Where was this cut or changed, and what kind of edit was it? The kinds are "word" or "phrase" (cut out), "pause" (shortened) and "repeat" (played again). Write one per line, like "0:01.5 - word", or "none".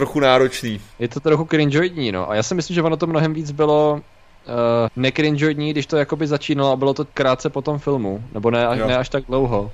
0:00.9 - pause
0:04.9 - word
0:07.1 - pause